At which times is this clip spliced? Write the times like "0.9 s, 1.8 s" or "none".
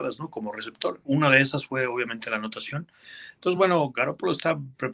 none